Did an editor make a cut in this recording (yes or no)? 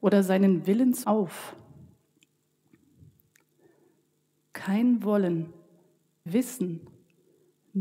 yes